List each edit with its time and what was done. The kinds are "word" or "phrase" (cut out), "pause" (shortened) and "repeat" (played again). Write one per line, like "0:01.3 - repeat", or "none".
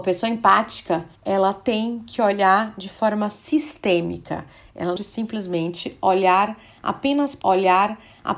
0:01.2 - pause
0:05.0 - phrase
0:07.4 - repeat